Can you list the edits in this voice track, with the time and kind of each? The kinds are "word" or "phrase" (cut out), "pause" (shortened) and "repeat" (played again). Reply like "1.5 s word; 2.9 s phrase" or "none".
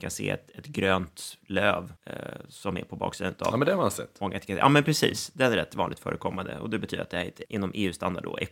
2.0 s pause; 7.4 s word

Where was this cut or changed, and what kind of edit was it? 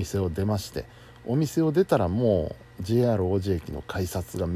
none

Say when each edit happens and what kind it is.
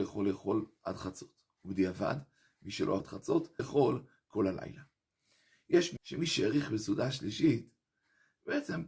3.0 s word; 3.6 s word; 6.0 s word

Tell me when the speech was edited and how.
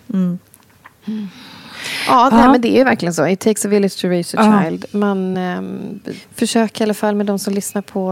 none

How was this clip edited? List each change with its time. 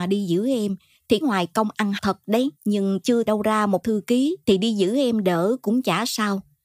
1.2 s word; 2.0 s word; 2.5 s pause; 3.3 s word; 3.8 s word; 4.4 s pause

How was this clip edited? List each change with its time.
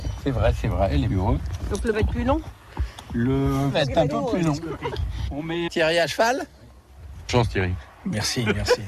1.1 s word; 1.9 s word; 3.7 s word; 4.1 s word; 4.9 s word; 5.7 s word; 7.3 s word

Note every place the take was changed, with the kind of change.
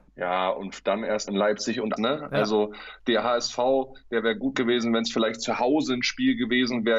1.3 s word; 2.0 s word; 4.5 s word

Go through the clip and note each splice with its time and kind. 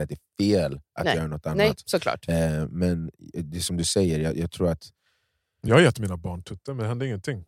none

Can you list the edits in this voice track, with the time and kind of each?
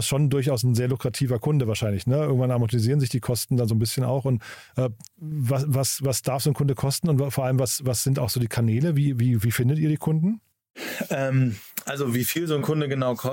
5.1 s pause

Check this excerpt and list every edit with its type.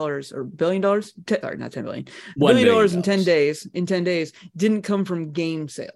1.4 s phrase

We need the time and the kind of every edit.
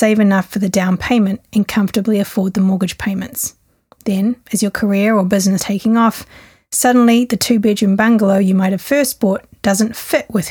5.6 s word

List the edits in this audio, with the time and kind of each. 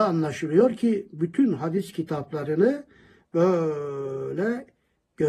none

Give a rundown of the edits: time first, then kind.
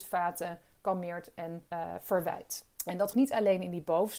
1.7 s pause; 2.7 s pause; 3.1 s word

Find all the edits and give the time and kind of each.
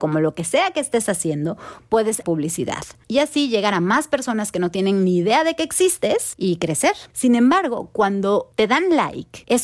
2.2 s word

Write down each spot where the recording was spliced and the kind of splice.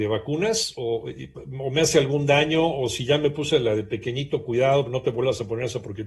none

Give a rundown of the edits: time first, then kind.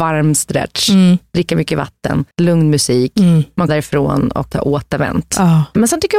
2.3 s pause; 3.7 s word; 4.5 s word

